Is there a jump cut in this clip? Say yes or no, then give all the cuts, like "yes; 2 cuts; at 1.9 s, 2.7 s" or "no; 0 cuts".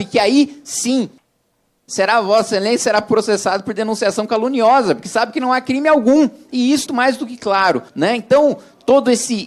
yes; 2 cuts; at 6.9 s, 7.9 s